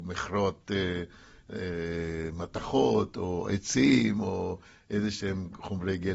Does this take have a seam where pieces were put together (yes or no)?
no